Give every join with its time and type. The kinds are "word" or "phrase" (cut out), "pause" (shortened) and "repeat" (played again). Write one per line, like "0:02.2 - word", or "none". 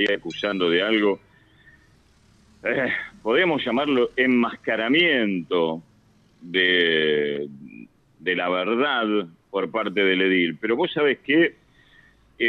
none